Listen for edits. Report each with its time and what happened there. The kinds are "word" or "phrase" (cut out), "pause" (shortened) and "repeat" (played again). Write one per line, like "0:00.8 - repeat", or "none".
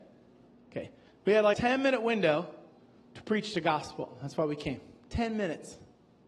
0:01.1 - pause
0:01.5 - word